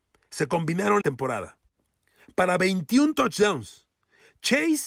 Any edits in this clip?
yes; 1 cut; at 1.0 s

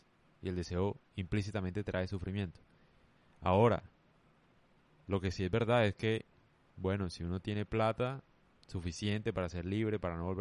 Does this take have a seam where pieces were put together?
yes; 1 cut; at 8.5 s

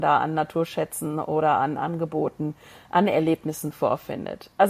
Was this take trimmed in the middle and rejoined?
no; 0 cuts

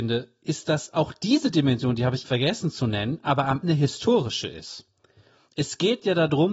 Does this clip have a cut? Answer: yes; 2 cuts; at 2.2 s, 3.6 s

